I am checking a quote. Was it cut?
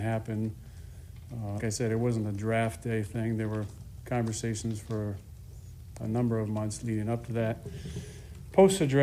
yes; 2 cuts; at 1.6 s, 6.0 s

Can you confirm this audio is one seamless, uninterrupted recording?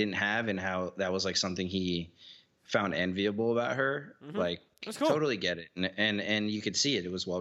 yes; 0 cuts

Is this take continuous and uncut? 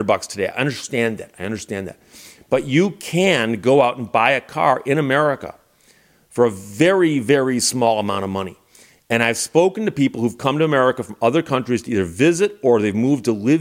yes; 0 cuts

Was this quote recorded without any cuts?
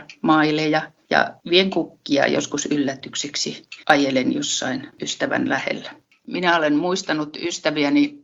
no; 1 cut; at 3.8 s

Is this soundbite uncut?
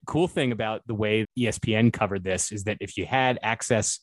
no; 1 cut; at 1.2 s

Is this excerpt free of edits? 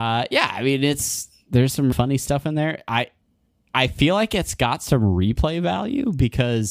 no; 1 cut; at 1.9 s

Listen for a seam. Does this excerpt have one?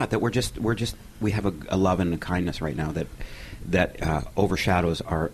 no; 0 cuts

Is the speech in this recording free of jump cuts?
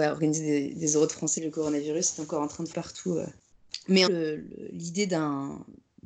no; 3 cuts; at 1.4 s, 2.7 s, 4.1 s

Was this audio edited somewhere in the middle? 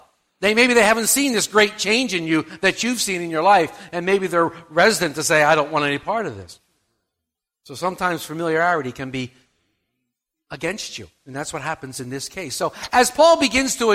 no; 0 cuts

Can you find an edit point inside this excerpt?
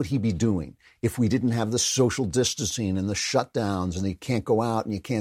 no; 0 cuts

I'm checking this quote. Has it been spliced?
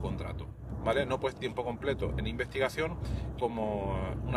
yes; 2 cuts; at 1.4 s, 3.4 s

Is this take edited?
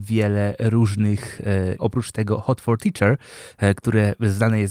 yes; 1 cut; at 1.8 s

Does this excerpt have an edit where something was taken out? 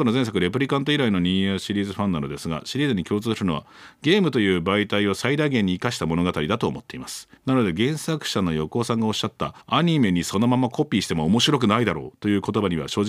yes; 2 cuts; at 7.4 s, 9.6 s

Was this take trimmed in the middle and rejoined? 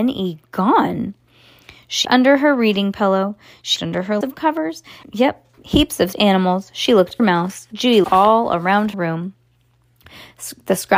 yes; 9 cuts; at 2.0 s, 3.8 s, 4.2 s, 5.0 s, 5.6 s, 6.1 s, 7.2 s, 8.0 s, 8.9 s

